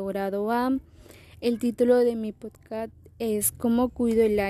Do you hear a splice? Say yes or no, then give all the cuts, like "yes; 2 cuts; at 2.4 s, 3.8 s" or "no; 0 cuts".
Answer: no; 0 cuts